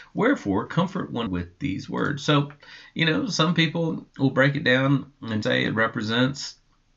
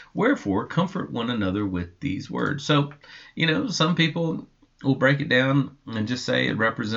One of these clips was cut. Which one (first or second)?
first